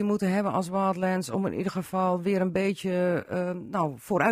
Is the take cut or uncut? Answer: uncut